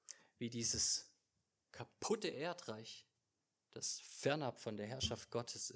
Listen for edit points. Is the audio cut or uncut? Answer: uncut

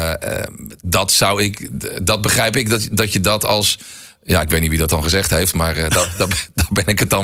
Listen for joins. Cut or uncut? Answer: uncut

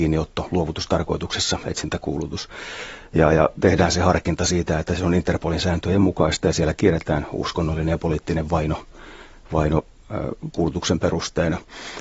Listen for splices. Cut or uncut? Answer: uncut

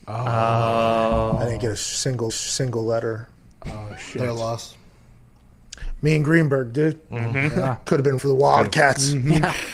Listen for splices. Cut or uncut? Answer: cut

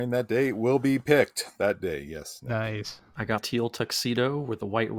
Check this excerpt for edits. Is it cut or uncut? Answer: cut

